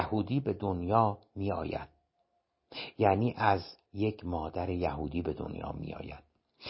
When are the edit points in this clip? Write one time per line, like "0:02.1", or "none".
0:03.9